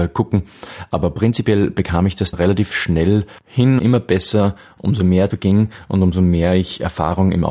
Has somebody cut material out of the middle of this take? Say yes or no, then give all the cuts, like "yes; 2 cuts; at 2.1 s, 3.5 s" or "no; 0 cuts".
yes; 3 cuts; at 2.3 s, 3.8 s, 5.3 s